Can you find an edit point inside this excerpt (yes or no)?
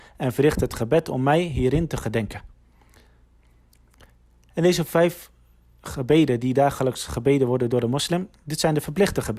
no